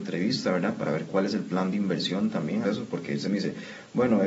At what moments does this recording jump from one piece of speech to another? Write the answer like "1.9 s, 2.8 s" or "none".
2.6 s